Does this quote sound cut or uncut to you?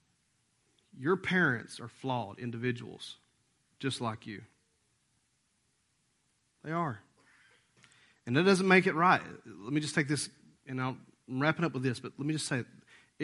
uncut